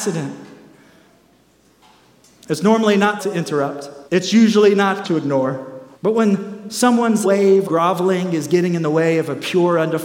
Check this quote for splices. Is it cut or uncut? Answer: cut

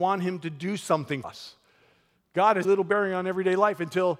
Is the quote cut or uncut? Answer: cut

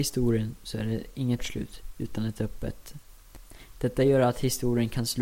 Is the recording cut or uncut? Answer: cut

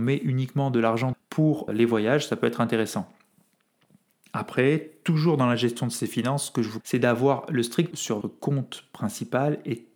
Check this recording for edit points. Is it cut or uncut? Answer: cut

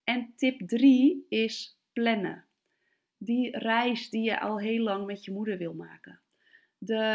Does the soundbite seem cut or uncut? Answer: uncut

